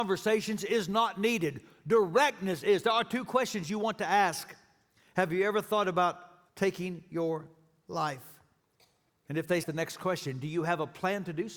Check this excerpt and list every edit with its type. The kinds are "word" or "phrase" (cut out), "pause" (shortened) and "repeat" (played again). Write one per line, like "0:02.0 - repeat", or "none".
0:06.5 - pause
0:08.6 - pause
0:09.6 - phrase